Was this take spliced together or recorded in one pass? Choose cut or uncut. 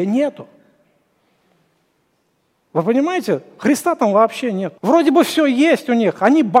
cut